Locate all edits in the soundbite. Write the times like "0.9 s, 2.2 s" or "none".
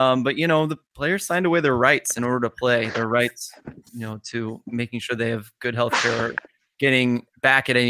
none